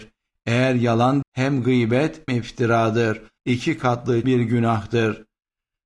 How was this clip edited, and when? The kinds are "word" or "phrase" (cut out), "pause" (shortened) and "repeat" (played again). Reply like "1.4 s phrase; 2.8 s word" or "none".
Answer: 1.2 s word; 2.3 s word; 3.4 s pause; 4.2 s word